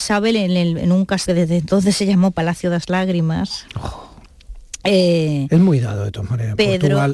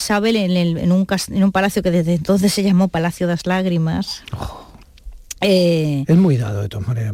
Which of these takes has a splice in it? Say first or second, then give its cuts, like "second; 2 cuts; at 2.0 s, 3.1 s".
first; 1 cut; at 1.3 s